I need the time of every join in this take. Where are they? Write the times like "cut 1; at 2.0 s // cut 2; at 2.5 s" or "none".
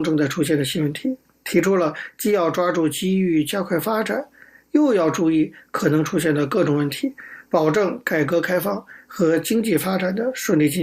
none